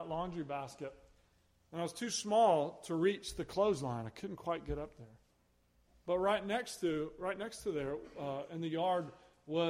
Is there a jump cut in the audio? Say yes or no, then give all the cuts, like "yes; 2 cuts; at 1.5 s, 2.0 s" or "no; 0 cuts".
no; 0 cuts